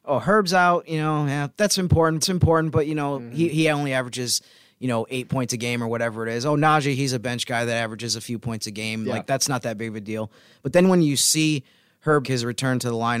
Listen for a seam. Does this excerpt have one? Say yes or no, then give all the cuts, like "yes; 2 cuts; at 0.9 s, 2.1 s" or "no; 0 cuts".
yes; 3 cuts; at 1.5 s, 2.2 s, 12.2 s